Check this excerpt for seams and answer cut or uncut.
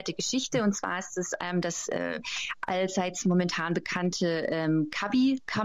uncut